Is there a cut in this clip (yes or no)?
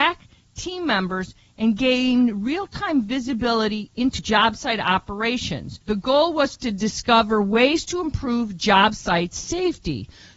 yes